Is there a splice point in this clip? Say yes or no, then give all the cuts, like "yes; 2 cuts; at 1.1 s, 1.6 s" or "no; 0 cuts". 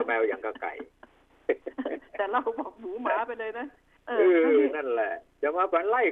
yes; 1 cut; at 4.0 s